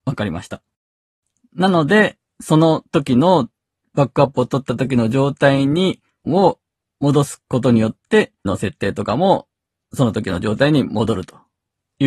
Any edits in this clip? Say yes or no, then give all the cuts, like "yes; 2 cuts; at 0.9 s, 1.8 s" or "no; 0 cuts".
yes; 2 cuts; at 6.3 s, 8.5 s